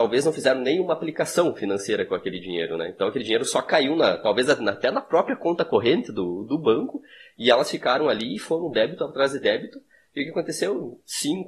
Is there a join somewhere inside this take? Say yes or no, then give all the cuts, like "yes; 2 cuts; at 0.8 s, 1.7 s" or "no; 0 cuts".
no; 0 cuts